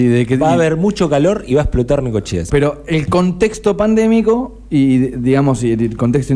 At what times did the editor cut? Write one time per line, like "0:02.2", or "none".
0:02.5